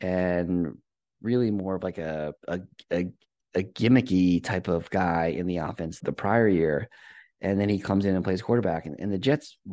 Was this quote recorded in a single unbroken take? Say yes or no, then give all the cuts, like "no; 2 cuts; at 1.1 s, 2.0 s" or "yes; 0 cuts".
no; 2 cuts; at 2.4 s, 6.0 s